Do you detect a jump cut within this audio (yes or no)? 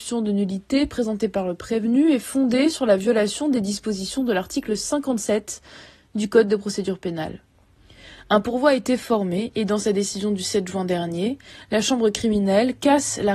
no